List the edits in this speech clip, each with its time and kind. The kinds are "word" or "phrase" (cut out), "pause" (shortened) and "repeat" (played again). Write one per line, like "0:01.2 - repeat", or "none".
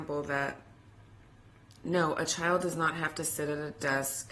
none